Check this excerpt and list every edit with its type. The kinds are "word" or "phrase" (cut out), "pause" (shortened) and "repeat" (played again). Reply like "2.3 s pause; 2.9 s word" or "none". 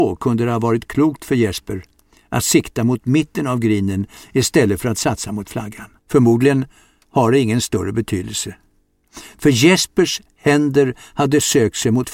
6.0 s pause